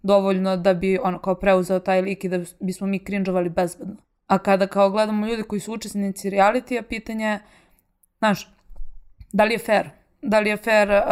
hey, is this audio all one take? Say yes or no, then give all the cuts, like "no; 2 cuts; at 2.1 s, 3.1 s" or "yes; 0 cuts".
no; 1 cut; at 4.0 s